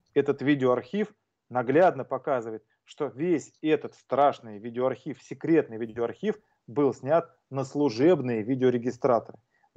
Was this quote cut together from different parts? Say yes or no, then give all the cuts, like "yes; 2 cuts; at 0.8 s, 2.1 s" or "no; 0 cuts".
no; 0 cuts